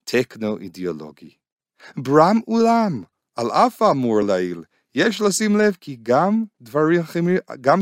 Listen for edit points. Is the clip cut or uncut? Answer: uncut